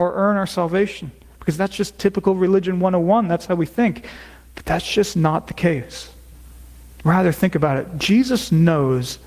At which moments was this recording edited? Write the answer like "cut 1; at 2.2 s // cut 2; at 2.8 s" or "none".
none